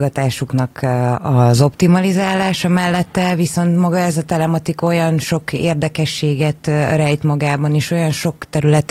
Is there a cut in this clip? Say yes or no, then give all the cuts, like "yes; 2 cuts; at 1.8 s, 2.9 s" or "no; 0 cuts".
no; 0 cuts